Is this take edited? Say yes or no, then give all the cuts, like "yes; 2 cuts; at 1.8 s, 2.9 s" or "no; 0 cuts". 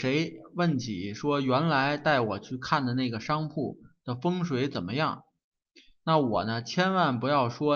no; 0 cuts